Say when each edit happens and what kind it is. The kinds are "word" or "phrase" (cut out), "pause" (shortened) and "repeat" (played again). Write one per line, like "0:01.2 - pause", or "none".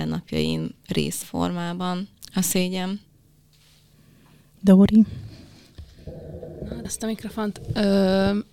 0:01.2 - word
0:06.8 - word